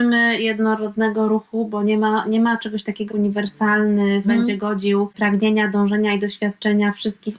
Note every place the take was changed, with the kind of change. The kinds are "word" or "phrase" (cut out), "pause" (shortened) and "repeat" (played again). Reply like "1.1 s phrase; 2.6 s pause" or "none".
3.1 s word; 4.2 s phrase